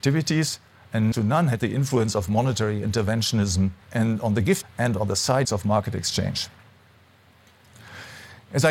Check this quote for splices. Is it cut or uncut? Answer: cut